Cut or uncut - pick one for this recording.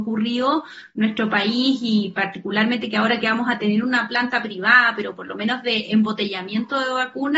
uncut